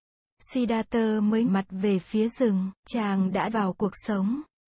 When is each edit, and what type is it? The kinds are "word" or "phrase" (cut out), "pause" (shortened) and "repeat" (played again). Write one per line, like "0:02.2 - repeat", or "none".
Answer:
0:01.5 - word
0:02.8 - pause
0:03.5 - word